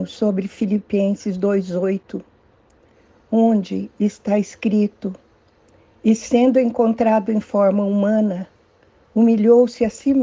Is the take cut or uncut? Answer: uncut